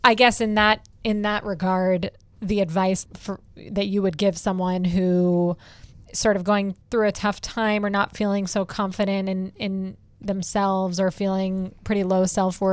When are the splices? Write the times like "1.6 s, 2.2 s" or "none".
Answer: 3.0 s, 6.8 s